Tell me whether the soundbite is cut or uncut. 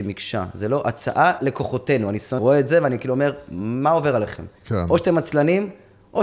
cut